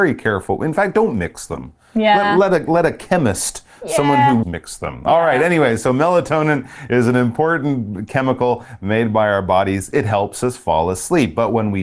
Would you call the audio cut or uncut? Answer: cut